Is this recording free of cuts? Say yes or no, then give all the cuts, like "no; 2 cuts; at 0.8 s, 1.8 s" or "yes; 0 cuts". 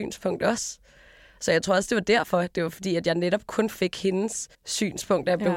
no; 1 cut; at 4.5 s